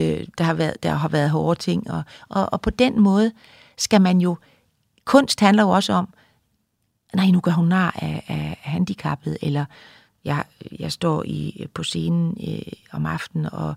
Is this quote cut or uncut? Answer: uncut